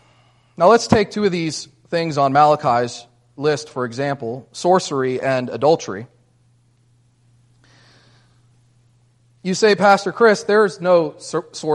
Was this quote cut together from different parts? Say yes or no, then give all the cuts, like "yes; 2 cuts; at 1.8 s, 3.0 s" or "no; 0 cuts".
no; 0 cuts